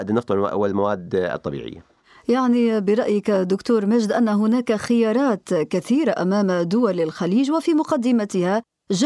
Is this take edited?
no; 0 cuts

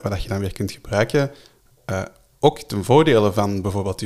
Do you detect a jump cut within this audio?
no; 0 cuts

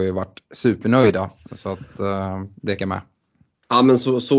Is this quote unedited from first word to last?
no; 1 cut; at 2.8 s

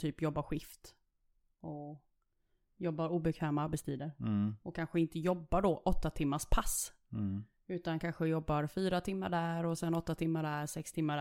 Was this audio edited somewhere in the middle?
no; 0 cuts

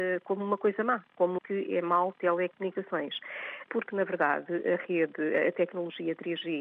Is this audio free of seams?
no; 2 cuts; at 1.4 s, 2.1 s

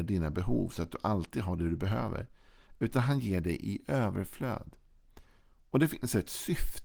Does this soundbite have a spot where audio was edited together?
no; 0 cuts

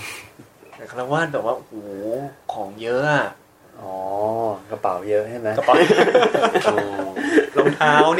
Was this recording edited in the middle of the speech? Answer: no; 0 cuts

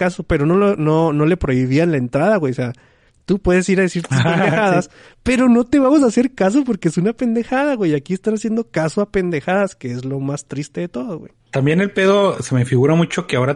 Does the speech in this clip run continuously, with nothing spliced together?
no; 1 cut; at 11.4 s

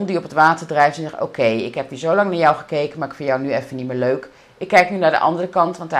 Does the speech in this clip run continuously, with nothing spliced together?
yes; 0 cuts

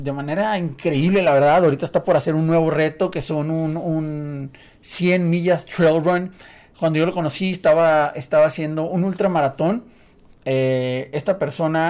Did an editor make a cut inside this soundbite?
no; 0 cuts

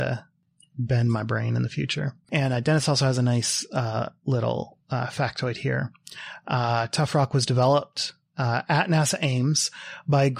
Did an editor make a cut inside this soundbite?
no; 0 cuts

